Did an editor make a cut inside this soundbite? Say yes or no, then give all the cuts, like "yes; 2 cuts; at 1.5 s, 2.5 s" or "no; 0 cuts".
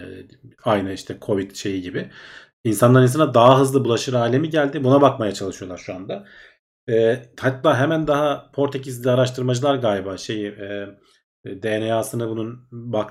no; 0 cuts